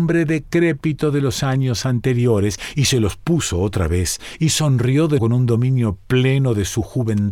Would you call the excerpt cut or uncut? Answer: cut